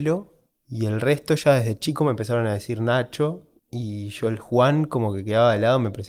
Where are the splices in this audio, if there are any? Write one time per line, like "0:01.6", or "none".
0:03.6